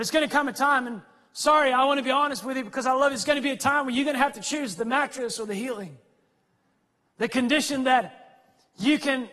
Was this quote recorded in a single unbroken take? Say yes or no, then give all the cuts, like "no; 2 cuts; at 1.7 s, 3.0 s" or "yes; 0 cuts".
yes; 0 cuts